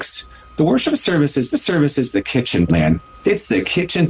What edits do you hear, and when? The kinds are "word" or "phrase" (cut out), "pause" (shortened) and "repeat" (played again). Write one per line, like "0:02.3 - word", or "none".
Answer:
0:01.5 - repeat
0:02.7 - word